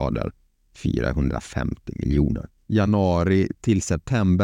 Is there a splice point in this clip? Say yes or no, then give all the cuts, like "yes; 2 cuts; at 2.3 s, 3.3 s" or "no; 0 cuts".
yes; 1 cut; at 2.6 s